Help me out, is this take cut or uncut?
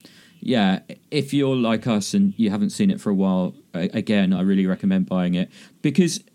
uncut